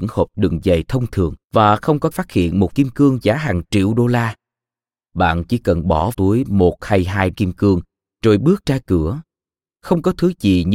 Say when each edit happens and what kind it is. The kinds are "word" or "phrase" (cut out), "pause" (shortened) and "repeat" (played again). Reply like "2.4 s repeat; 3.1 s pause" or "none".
1.4 s pause; 2.1 s phrase; 2.7 s phrase; 3.2 s word; 6.1 s word; 7.3 s word